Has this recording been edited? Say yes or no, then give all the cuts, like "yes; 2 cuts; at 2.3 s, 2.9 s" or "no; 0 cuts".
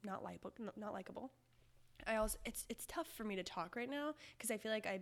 no; 0 cuts